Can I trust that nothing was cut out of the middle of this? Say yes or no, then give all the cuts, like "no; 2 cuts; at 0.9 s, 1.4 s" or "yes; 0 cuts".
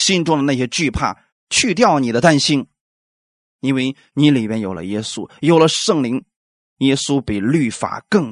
yes; 0 cuts